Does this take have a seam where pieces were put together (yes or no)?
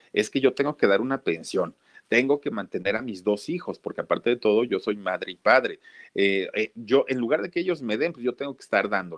no